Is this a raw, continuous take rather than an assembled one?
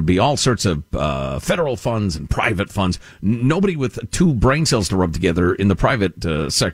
yes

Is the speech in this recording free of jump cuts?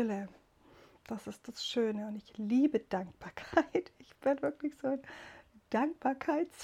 yes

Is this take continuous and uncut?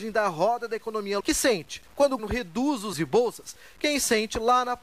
no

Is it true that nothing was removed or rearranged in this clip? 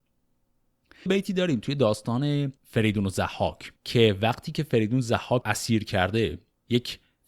no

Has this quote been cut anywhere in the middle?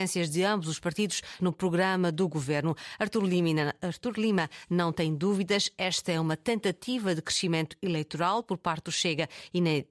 yes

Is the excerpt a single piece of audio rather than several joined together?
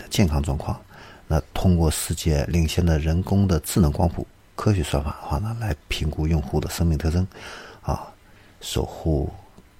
yes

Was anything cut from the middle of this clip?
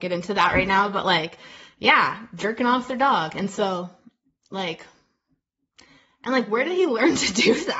no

